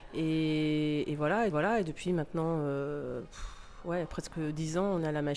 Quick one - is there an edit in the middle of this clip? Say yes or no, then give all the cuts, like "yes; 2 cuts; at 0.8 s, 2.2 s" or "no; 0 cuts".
yes; 1 cut; at 1.5 s